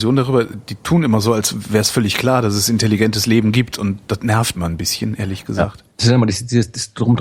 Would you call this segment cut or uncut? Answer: cut